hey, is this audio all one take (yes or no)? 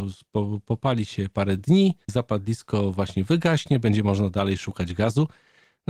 yes